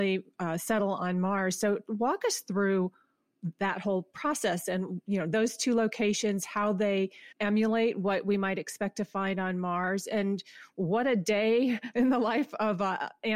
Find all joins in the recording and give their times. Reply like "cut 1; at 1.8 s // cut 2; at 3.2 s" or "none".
cut 1; at 7.3 s